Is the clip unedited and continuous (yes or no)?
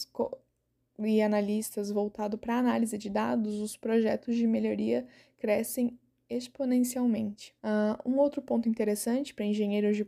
no